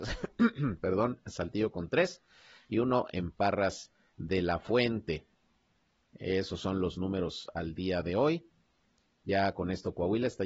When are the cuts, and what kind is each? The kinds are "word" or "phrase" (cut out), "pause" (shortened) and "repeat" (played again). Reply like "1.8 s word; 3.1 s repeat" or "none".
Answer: none